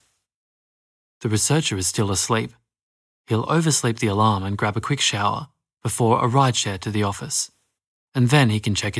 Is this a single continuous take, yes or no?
yes